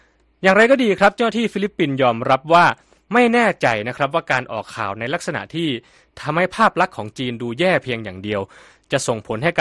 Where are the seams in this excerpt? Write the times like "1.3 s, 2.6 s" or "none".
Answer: none